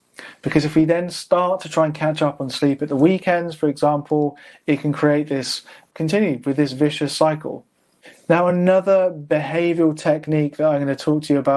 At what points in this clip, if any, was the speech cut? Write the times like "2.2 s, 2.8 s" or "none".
none